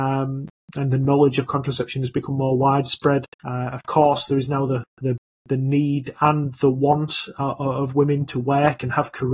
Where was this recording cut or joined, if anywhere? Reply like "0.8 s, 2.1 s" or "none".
3.3 s